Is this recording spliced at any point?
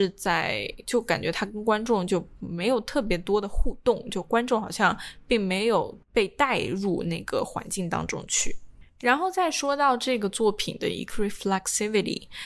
yes; 2 cuts; at 6.0 s, 11.1 s

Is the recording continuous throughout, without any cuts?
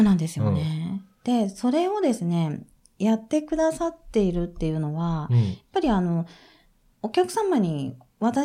yes; 0 cuts

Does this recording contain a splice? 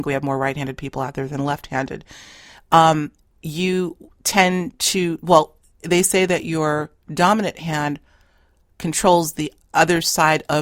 no; 0 cuts

